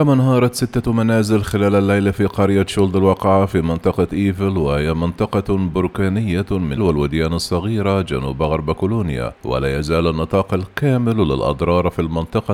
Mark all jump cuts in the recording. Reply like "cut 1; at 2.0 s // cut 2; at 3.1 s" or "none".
cut 1; at 6.8 s // cut 2; at 9.4 s